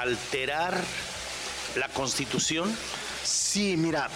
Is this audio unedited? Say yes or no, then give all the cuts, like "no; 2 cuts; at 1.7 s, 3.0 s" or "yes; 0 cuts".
no; 1 cut; at 1.7 s